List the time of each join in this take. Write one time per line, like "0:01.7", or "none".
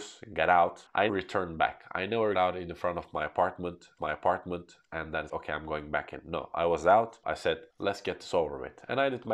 0:01.1
0:02.3
0:04.0
0:05.3
0:07.2
0:07.7